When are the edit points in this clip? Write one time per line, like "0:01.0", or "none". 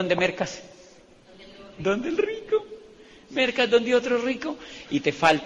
none